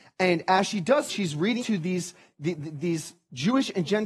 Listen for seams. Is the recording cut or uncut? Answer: cut